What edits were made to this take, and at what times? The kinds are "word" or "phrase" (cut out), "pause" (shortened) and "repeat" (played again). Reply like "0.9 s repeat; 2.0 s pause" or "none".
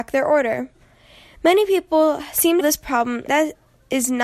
2.6 s phrase; 3.3 s word